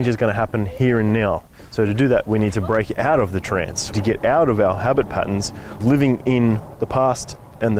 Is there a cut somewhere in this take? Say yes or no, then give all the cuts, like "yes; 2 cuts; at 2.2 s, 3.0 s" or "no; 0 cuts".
yes; 2 cuts; at 3.9 s, 5.8 s